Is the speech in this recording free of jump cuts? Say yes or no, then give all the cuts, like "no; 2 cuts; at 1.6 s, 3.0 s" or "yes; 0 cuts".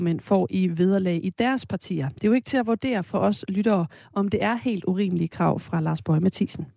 yes; 0 cuts